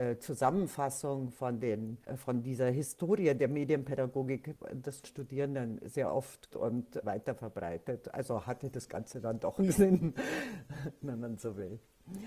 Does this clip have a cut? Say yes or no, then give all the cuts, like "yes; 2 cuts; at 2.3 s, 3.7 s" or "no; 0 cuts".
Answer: yes; 4 cuts; at 2.0 s, 5.0 s, 6.5 s, 7.0 s